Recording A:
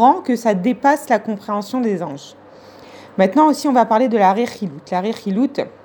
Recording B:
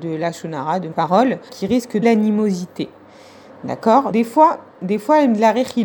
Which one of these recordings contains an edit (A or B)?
B